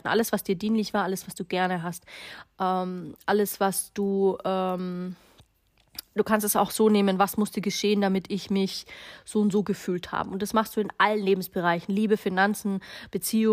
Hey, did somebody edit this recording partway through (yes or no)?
no